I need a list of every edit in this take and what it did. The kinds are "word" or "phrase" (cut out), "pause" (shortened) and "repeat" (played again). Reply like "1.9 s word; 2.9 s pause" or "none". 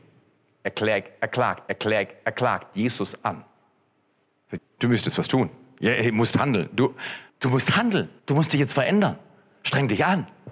1.7 s repeat; 4.6 s word; 7.3 s pause; 8.2 s pause